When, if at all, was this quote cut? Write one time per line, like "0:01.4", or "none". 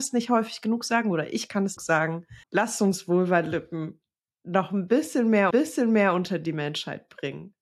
0:01.8
0:02.4
0:05.5